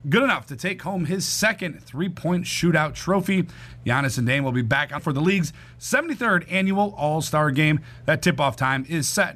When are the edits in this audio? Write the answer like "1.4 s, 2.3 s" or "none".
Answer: 5.0 s